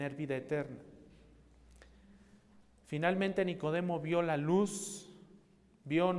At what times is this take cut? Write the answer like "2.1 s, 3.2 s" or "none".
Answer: none